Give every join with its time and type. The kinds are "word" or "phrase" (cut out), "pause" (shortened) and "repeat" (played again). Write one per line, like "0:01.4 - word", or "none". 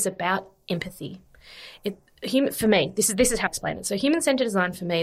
0:03.5 - word

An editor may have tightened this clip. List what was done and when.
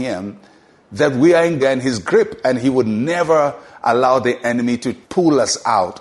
0:01.6 - phrase
0:05.0 - pause

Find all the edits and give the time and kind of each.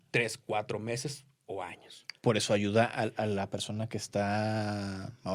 none

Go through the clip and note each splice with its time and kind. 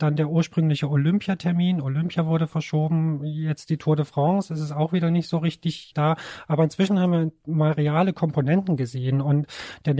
none

